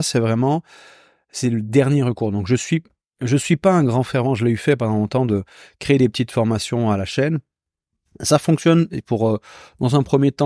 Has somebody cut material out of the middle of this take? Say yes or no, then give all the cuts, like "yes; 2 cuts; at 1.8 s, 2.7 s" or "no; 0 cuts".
no; 0 cuts